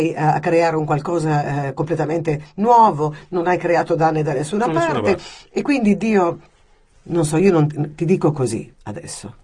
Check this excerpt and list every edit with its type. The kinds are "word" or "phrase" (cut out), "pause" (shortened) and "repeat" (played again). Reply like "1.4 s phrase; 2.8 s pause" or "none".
none